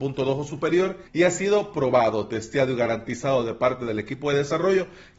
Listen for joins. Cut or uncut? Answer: cut